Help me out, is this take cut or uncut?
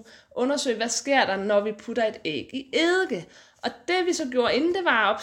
uncut